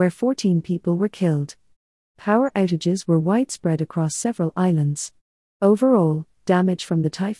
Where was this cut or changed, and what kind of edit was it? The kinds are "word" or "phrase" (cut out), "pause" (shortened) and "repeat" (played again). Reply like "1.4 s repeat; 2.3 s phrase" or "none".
none